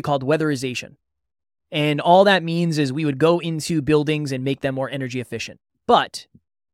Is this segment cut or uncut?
uncut